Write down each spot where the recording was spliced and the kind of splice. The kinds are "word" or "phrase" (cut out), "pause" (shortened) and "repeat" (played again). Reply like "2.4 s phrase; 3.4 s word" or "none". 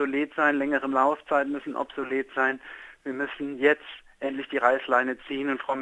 none